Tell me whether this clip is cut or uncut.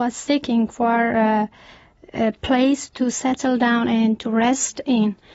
uncut